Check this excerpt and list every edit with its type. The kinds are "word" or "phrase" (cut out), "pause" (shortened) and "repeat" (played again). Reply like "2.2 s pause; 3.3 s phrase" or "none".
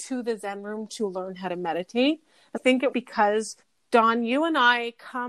2.6 s word; 2.9 s word; 3.6 s pause